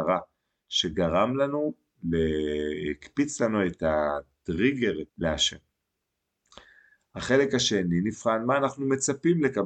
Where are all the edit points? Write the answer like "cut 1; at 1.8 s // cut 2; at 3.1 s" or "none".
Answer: cut 1; at 5.1 s